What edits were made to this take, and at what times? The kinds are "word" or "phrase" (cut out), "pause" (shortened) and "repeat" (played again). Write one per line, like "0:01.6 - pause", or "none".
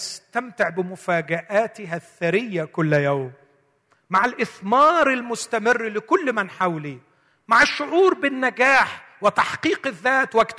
none